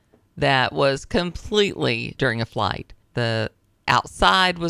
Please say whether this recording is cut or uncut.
cut